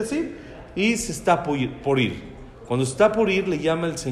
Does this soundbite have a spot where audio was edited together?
no; 0 cuts

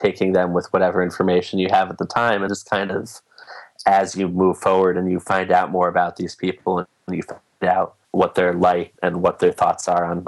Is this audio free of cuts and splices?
no; 3 cuts; at 2.5 s, 8.0 s, 8.9 s

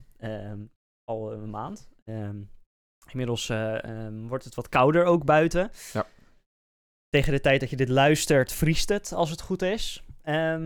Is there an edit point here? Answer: no; 0 cuts

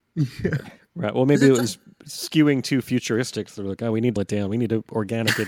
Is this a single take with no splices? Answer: no; 1 cut; at 4.2 s

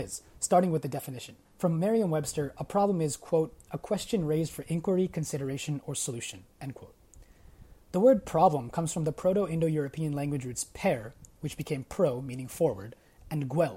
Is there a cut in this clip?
yes; 1 cut; at 1.4 s

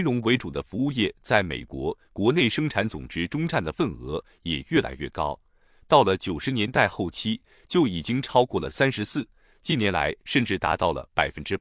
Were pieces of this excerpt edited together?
yes; 1 cut; at 2.1 s

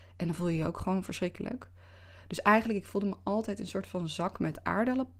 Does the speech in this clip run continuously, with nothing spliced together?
yes; 0 cuts

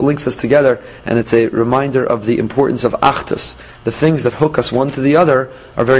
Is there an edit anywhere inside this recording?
no; 0 cuts

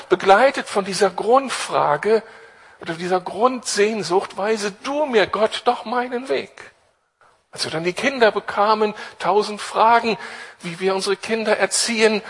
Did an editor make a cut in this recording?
no; 0 cuts

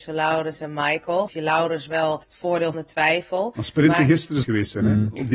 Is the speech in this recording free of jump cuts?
no; 4 cuts; at 1.3 s, 2.2 s, 2.7 s, 4.4 s

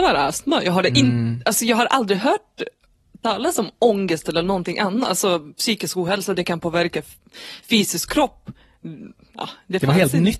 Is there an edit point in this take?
no; 0 cuts

